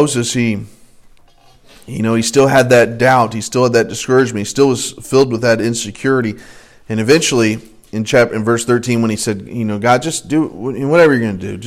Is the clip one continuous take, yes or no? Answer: yes